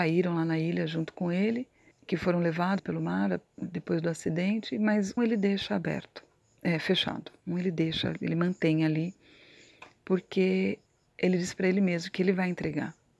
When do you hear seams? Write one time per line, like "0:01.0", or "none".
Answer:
0:01.9
0:02.8
0:05.2
0:10.9